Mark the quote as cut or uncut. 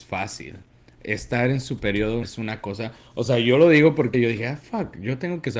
cut